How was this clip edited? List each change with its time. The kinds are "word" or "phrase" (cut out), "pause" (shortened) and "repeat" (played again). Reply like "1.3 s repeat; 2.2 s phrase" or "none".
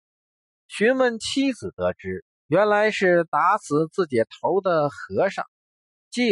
2.3 s pause